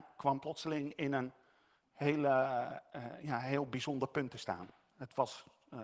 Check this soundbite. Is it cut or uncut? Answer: uncut